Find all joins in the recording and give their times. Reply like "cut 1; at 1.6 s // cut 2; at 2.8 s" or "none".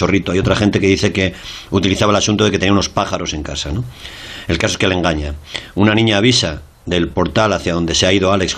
none